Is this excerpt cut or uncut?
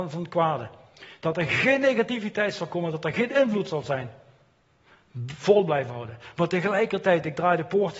uncut